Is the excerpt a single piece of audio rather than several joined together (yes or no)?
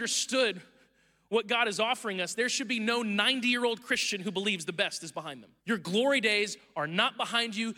no